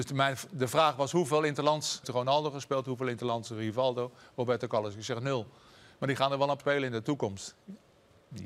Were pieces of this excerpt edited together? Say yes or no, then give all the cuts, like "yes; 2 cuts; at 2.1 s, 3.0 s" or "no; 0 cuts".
yes; 2 cuts; at 2.0 s, 6.6 s